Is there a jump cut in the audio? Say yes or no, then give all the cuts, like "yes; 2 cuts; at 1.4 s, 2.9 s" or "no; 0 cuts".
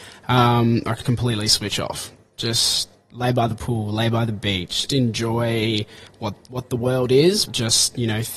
yes; 3 cuts; at 1.0 s, 4.9 s, 7.5 s